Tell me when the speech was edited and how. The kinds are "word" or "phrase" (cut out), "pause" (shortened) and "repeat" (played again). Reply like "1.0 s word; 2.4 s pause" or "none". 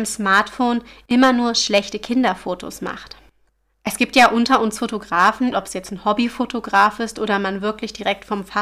5.5 s word